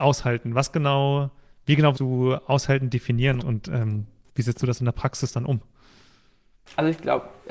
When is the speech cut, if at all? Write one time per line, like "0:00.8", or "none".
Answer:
0:01.9
0:03.4